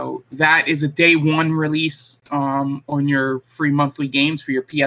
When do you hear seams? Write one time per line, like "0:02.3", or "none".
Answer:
none